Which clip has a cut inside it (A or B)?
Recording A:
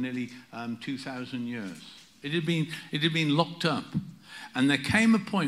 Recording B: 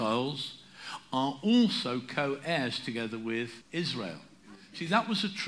B